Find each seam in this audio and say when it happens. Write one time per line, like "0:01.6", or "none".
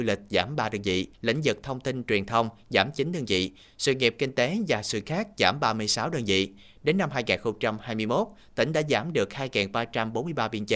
0:01.1
0:05.0